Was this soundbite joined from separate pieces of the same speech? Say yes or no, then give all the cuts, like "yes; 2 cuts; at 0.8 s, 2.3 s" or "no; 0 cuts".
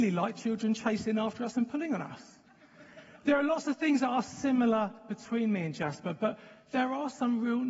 no; 0 cuts